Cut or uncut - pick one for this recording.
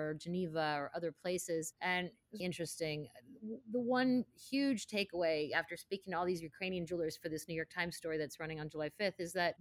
cut